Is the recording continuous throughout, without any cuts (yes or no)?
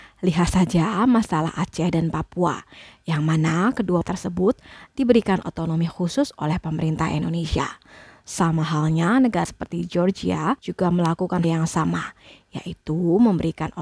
no